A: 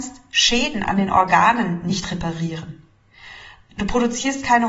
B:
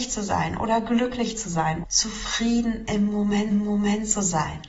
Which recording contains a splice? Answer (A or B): B